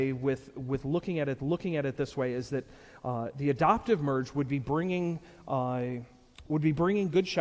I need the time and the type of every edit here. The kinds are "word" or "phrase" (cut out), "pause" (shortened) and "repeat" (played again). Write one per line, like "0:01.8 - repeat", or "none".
0:01.4 - repeat